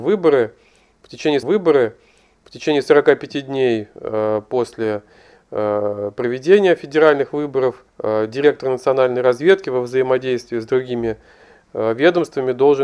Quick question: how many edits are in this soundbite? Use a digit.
2